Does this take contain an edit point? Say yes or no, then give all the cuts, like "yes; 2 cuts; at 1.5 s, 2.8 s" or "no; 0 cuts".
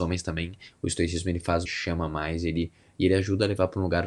yes; 1 cut; at 1.7 s